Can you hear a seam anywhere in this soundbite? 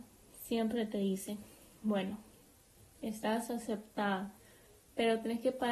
no; 0 cuts

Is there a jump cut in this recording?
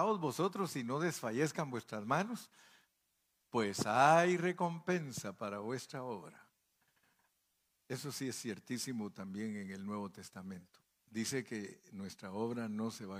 no; 0 cuts

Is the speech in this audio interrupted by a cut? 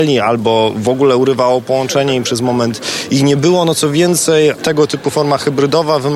no; 0 cuts

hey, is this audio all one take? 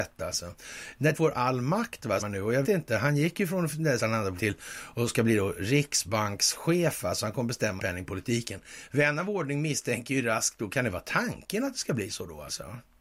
no; 6 cuts; at 1.1 s, 2.2 s, 2.6 s, 4.0 s, 4.4 s, 7.8 s

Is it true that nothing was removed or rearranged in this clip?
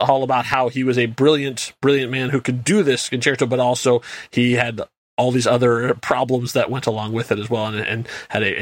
yes; 0 cuts

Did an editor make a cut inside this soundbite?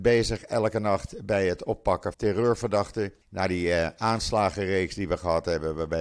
yes; 2 cuts; at 2.1 s, 3.2 s

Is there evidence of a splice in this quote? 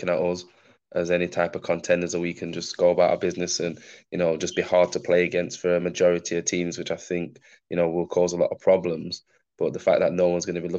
no; 0 cuts

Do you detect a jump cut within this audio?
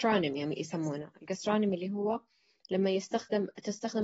no; 0 cuts

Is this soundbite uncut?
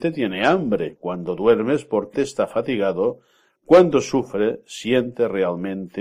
no; 1 cut; at 2.1 s

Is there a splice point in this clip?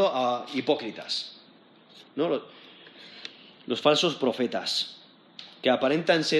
no; 0 cuts

